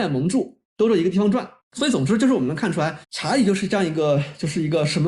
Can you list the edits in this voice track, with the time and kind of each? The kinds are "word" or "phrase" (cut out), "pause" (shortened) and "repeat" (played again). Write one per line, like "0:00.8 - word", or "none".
0:01.6 - pause
0:03.0 - pause